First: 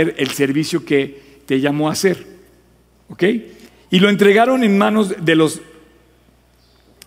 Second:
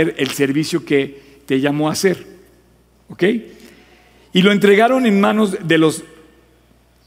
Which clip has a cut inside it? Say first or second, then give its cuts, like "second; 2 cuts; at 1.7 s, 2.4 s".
first; 1 cut; at 3.7 s